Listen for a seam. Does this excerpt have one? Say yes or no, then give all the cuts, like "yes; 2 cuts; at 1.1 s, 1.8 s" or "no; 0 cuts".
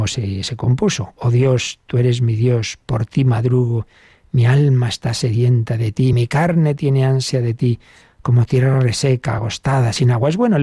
no; 0 cuts